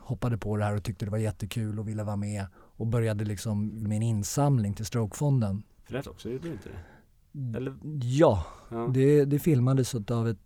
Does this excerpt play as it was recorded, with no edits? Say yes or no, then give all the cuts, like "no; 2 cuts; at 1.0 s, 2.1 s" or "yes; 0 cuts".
no; 3 cuts; at 2.6 s, 3.8 s, 6.0 s